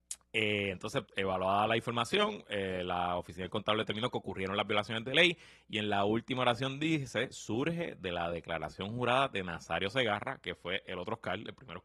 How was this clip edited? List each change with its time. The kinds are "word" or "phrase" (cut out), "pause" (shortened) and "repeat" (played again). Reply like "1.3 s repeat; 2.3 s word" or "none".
1.1 s word